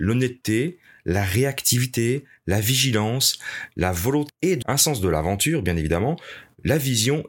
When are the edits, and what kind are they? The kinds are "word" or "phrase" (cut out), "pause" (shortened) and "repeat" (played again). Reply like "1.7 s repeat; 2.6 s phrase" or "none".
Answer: 4.3 s word; 4.6 s word